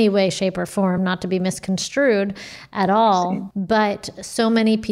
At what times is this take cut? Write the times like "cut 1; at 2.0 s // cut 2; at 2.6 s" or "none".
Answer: none